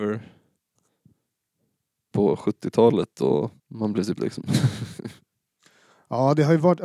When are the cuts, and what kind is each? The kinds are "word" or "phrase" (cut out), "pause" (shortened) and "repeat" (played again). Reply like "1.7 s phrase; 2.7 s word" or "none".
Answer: 2.1 s word; 3.6 s pause; 4.2 s word